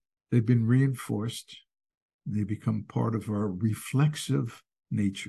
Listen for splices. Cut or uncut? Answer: uncut